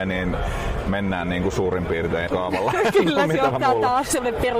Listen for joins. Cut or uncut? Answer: cut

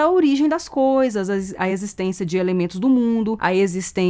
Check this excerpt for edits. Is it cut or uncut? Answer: uncut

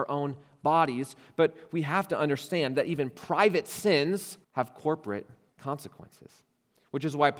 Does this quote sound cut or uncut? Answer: cut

